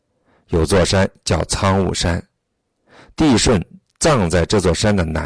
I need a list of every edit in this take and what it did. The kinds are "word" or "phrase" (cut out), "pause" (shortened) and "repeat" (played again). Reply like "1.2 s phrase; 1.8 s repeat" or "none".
none